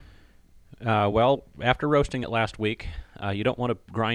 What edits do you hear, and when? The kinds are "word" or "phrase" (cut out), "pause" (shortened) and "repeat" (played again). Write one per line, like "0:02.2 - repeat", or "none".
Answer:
none